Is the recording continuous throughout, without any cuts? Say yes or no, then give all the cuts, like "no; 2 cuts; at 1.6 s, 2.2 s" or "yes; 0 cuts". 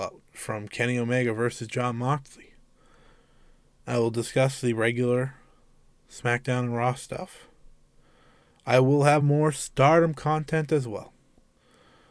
yes; 0 cuts